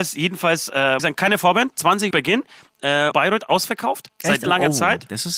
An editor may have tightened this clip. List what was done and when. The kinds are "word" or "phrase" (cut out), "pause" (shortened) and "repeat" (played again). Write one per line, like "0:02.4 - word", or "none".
0:01.0 - phrase
0:02.1 - word
0:03.1 - word
0:04.5 - word